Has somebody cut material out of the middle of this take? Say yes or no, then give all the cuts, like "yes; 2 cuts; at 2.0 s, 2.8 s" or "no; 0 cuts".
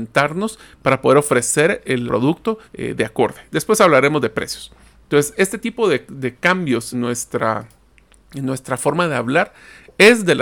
yes; 3 cuts; at 2.1 s, 2.6 s, 6.9 s